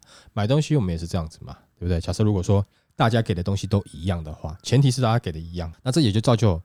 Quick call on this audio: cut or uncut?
cut